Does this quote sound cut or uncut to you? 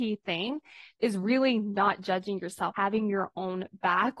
cut